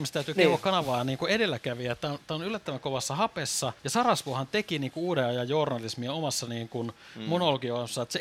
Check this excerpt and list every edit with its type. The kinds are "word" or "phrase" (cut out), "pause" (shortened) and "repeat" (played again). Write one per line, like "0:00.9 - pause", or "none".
0:03.8 - pause